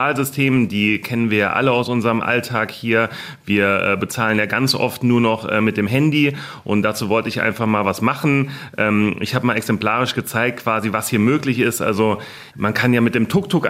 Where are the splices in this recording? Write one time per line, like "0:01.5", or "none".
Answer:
0:12.5